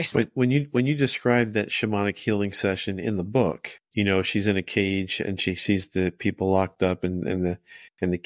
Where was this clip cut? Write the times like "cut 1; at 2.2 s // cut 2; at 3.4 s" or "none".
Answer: cut 1; at 3.8 s